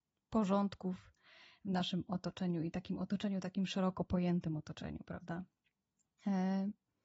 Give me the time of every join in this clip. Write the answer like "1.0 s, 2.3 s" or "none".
none